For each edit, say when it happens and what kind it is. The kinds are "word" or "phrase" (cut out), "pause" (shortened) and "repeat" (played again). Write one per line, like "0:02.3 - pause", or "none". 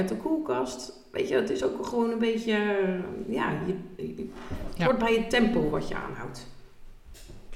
none